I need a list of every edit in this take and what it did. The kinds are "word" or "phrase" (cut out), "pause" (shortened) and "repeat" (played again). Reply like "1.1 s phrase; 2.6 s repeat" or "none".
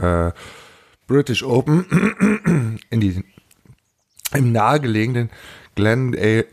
none